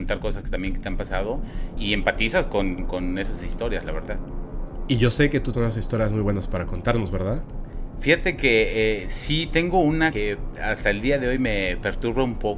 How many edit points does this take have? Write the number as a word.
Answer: four